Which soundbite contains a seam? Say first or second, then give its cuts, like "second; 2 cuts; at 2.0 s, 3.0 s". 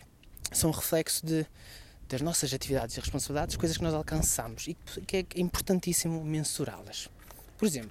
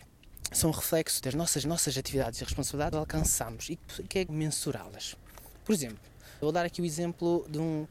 second; 5 cuts; at 1.2 s, 1.6 s, 2.9 s, 4.3 s, 6.4 s